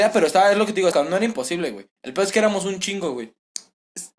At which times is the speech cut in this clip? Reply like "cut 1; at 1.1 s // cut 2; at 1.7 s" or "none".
cut 1; at 0.9 s

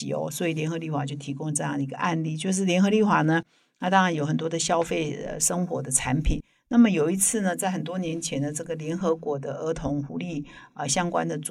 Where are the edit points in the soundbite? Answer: none

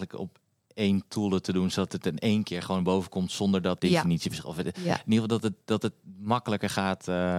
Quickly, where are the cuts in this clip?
cut 1; at 3.8 s

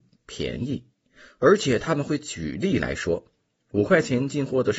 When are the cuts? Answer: none

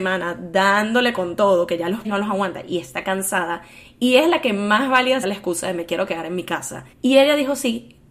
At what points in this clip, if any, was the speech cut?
cut 1; at 2.0 s // cut 2; at 5.2 s // cut 3; at 6.9 s

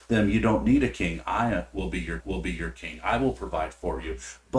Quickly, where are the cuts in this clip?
cut 1; at 2.2 s

